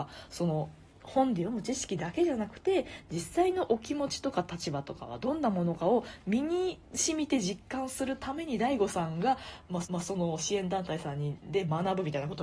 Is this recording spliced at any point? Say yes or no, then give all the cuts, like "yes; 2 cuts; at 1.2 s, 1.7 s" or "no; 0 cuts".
yes; 2 cuts; at 6.8 s, 9.8 s